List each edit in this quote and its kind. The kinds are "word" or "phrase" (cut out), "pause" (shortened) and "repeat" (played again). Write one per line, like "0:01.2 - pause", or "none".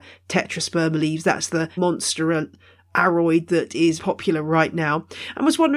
0:01.8 - word
0:04.0 - word